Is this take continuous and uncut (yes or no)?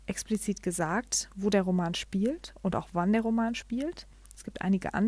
yes